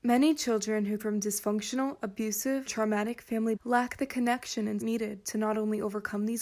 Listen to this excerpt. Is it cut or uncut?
cut